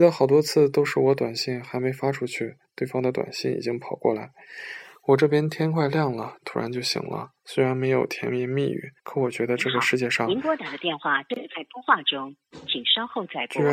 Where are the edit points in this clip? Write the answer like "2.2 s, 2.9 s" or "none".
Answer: 7.4 s, 9.0 s